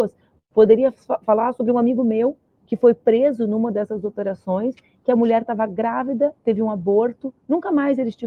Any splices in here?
no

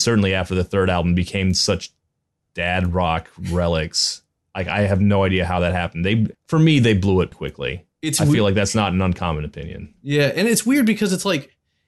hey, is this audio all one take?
no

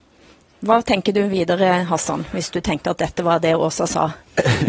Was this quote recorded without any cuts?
yes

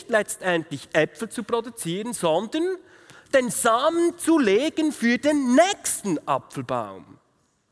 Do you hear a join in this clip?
no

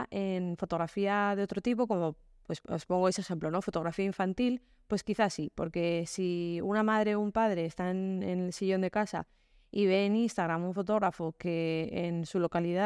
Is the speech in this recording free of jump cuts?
yes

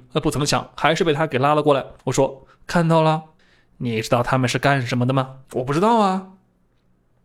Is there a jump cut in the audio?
yes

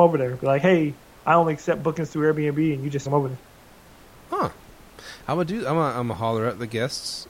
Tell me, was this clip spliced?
yes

